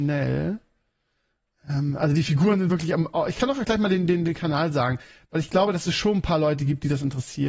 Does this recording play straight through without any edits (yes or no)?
yes